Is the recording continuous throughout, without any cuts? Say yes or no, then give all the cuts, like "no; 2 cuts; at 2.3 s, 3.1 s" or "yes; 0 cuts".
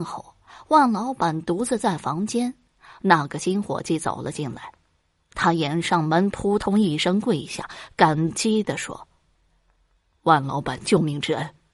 yes; 0 cuts